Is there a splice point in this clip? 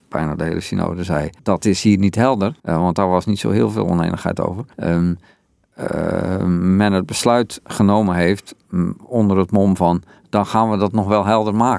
yes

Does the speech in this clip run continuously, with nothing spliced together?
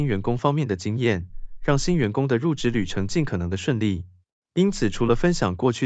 yes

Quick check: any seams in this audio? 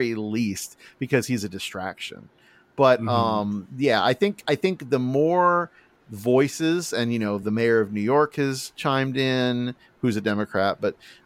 no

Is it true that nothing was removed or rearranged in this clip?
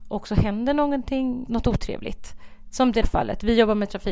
no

